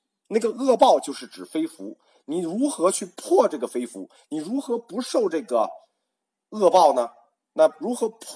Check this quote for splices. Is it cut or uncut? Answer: uncut